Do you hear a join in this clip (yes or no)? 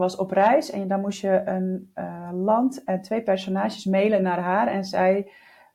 no